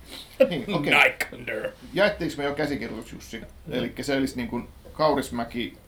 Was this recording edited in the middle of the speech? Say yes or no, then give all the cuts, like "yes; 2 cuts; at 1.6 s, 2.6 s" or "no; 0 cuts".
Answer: no; 0 cuts